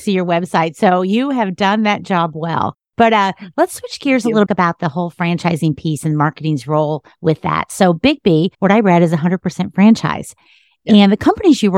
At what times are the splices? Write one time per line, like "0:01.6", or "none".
0:02.8
0:04.5
0:08.5